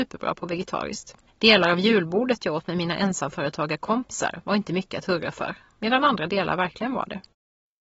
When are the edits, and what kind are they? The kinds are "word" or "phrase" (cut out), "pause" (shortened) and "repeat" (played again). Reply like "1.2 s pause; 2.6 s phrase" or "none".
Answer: 1.3 s pause